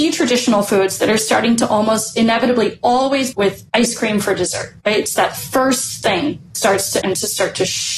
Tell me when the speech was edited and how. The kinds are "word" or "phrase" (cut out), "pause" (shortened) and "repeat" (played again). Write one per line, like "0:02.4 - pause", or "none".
0:03.3 - phrase
0:03.7 - pause
0:04.8 - pause
0:06.5 - word
0:07.0 - word